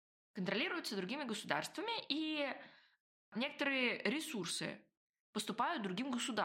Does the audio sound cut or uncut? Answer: uncut